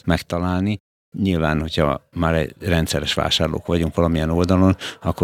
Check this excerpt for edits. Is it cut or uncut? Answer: uncut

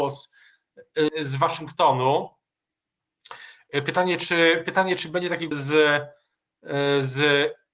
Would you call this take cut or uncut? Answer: cut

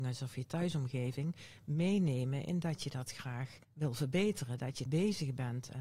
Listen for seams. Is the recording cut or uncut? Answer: cut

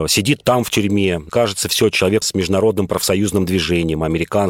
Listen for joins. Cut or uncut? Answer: cut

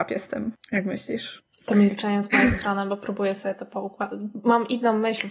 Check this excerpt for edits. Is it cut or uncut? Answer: uncut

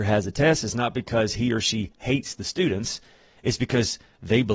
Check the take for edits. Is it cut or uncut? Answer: uncut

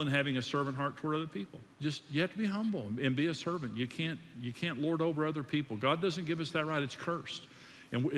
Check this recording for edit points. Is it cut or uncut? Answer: cut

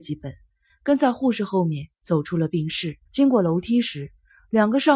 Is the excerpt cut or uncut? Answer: cut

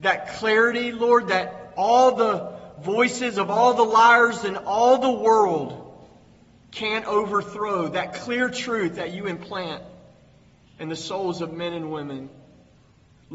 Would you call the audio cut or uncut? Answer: uncut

